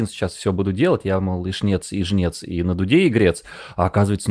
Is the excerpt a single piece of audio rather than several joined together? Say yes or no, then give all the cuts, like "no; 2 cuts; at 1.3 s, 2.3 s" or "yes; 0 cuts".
yes; 0 cuts